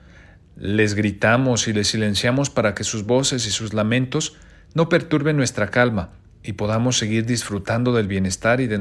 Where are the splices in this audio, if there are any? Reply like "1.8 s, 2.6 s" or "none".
none